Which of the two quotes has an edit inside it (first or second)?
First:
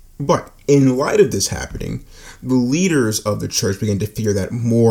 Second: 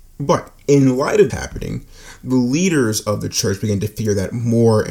second